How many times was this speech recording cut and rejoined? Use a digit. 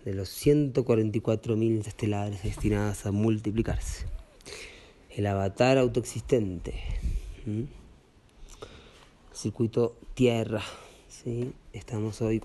1